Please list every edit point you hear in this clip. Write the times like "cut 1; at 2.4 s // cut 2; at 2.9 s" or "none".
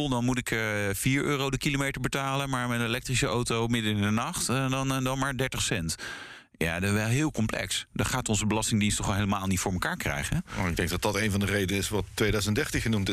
none